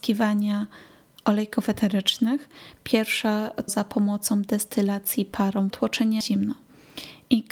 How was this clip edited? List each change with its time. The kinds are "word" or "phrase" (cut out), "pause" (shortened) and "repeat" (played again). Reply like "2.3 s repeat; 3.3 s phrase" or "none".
3.7 s word; 5.7 s phrase; 6.2 s word